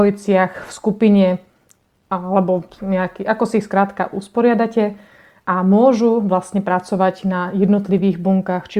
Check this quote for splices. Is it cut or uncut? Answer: uncut